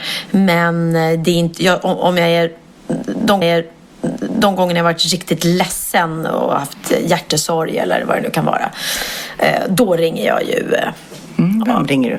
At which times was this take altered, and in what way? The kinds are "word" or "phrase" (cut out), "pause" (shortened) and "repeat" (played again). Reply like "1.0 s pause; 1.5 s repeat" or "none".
3.4 s repeat